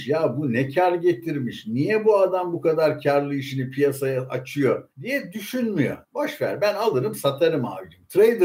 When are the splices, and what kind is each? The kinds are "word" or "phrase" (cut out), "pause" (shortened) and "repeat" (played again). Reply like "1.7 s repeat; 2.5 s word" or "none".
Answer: 4.9 s pause; 6.0 s pause